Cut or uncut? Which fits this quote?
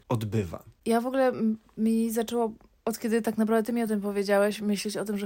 uncut